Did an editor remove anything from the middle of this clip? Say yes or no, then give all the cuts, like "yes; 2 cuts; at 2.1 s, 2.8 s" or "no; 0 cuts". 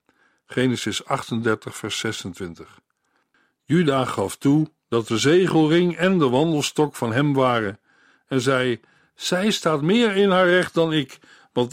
no; 0 cuts